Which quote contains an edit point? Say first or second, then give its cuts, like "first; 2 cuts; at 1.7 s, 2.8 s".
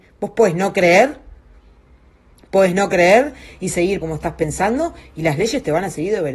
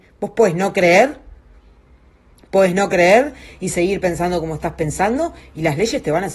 first; 1 cut; at 4.0 s